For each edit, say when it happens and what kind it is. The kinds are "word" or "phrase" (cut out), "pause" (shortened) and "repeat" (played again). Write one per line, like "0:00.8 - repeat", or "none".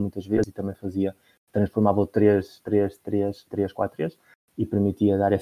0:01.5 - word
0:03.5 - word